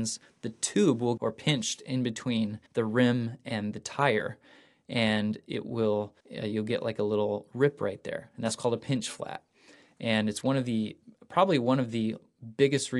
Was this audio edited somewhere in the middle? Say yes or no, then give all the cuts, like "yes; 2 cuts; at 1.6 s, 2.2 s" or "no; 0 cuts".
yes; 3 cuts; at 1.2 s, 2.7 s, 6.2 s